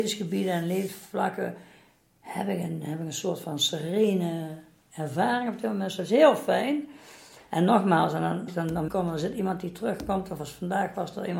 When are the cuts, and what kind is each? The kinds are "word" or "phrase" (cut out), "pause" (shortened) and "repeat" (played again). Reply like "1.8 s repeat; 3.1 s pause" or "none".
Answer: 8.5 s word; 8.9 s word